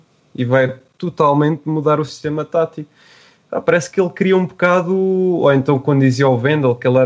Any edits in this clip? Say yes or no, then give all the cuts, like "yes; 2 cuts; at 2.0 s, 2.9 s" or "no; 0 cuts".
no; 0 cuts